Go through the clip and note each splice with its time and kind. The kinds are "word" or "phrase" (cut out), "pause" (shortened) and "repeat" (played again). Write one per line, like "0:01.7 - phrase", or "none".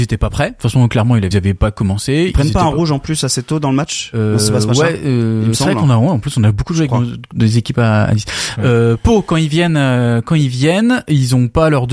0:01.3 - phrase